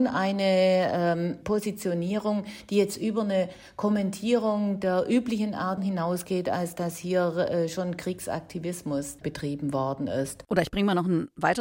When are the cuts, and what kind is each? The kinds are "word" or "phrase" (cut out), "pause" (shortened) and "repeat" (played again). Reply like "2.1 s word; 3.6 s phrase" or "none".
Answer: 5.8 s word